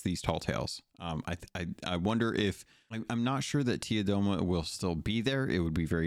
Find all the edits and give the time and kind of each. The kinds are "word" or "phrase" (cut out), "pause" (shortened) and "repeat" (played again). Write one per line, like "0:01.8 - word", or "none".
none